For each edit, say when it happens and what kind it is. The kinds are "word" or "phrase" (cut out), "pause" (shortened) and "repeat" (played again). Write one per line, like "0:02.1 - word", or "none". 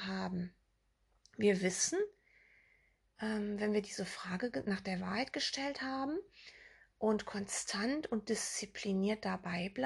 none

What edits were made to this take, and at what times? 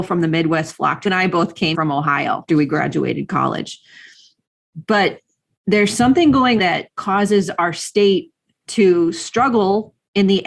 0:01.1 - word
0:01.7 - word
0:02.5 - word
0:06.6 - word

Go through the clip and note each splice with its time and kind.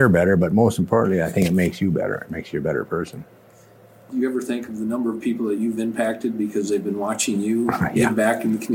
0:04.1 - word

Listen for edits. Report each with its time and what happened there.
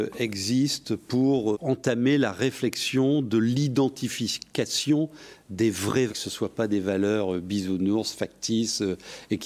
0:01.5 - word
0:06.1 - word

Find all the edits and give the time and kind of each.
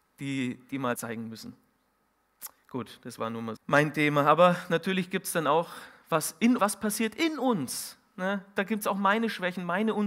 0:01.0 - word
0:03.6 - word
0:06.6 - word

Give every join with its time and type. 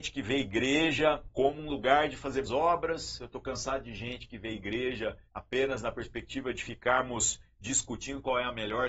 0:01.3 - pause
0:02.4 - word
0:05.3 - pause

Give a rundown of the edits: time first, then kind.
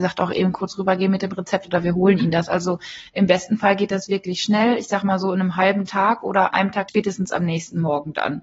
0:06.5 - phrase
0:06.9 - phrase

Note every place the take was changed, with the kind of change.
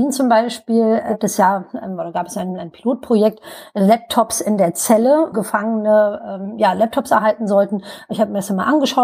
0:05.3 - word

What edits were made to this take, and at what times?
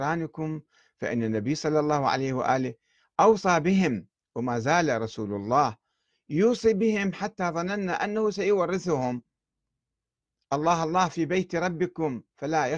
none

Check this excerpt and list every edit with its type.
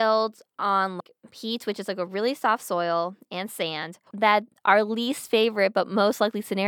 0:01.2 - pause
0:04.1 - pause

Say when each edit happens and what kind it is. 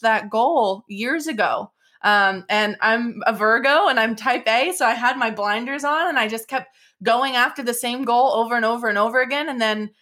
none

